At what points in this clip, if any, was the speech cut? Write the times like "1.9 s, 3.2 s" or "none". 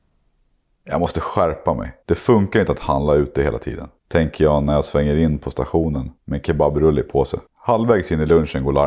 2.0 s, 4.0 s, 6.2 s, 7.5 s